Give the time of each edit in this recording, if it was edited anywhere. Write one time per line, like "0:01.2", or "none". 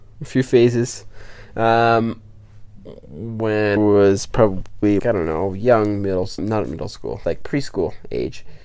0:03.8
0:05.0
0:06.4
0:07.2